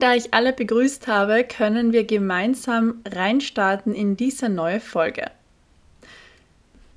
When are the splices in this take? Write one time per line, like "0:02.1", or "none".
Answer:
none